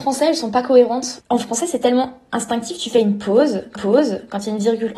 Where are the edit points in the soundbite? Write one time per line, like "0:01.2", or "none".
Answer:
0:03.8